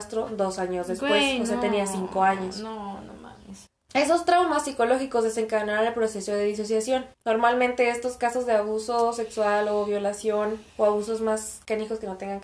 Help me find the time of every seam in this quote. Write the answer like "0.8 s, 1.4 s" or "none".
7.1 s, 10.7 s